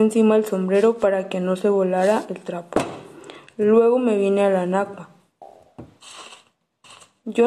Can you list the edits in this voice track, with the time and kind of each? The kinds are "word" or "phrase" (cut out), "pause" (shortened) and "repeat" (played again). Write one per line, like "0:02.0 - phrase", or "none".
none